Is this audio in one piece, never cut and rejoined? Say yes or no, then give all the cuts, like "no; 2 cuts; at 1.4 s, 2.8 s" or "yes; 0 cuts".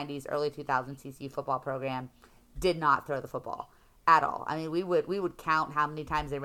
yes; 0 cuts